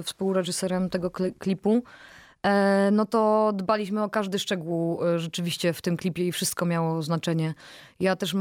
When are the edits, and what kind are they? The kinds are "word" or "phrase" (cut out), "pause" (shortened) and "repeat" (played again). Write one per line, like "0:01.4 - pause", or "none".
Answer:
0:05.8 - phrase